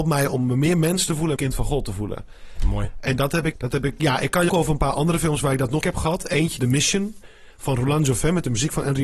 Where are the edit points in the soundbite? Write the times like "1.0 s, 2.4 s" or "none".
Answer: 1.4 s, 3.5 s, 4.5 s, 5.8 s, 6.6 s